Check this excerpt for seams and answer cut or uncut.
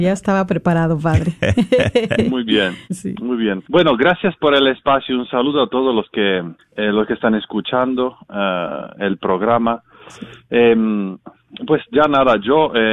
cut